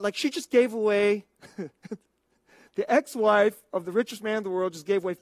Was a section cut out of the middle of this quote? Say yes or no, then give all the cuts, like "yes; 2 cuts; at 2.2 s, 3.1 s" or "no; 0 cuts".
no; 0 cuts